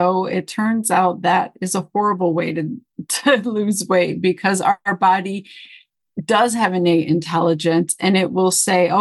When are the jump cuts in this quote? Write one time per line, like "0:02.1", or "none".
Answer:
none